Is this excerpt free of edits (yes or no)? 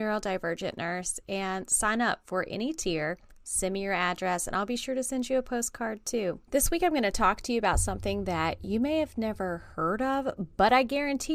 no